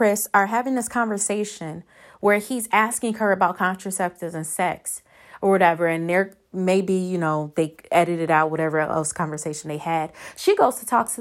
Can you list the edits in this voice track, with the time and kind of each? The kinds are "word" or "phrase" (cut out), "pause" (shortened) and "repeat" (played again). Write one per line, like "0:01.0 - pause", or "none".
none